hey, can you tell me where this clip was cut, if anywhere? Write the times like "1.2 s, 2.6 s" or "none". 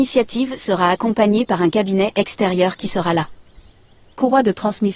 none

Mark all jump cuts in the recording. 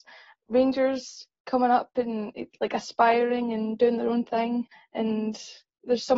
4.7 s

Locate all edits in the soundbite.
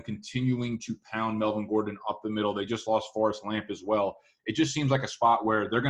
none

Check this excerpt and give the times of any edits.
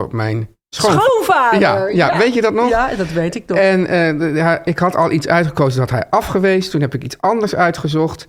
none

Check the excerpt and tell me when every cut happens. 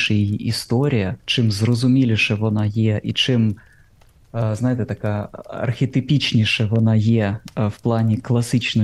1.2 s

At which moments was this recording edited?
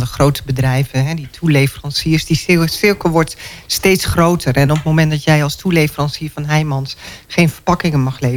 none

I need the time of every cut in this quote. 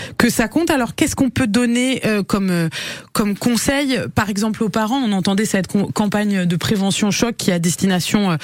none

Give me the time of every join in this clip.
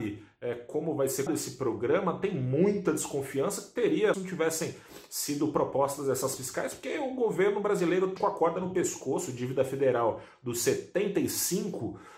1.3 s, 4.1 s, 6.4 s, 8.2 s

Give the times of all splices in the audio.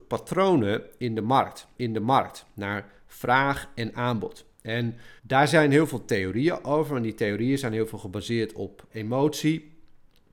1.8 s, 5.2 s, 8.9 s

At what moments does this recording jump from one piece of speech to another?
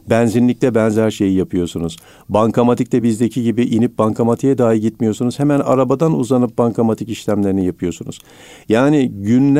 none

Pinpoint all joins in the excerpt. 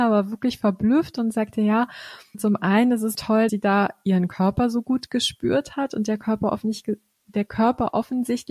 2.3 s, 3.1 s, 3.5 s

